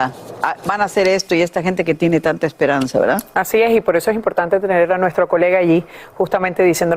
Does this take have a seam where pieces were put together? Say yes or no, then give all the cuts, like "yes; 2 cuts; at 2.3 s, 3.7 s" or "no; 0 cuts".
no; 0 cuts